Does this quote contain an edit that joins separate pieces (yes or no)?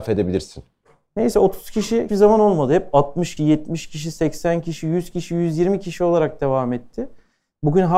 yes